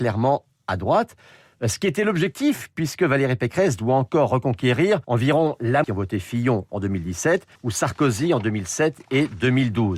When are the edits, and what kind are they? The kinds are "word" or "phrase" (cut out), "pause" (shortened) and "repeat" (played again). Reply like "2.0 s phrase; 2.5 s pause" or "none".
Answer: 5.0 s pause; 5.8 s phrase; 7.6 s pause